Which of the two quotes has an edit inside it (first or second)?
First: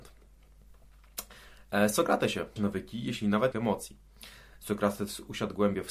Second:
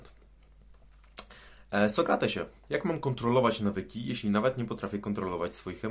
first